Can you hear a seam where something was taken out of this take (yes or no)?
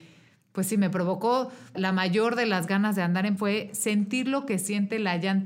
yes